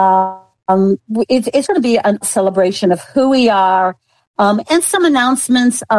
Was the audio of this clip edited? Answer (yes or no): yes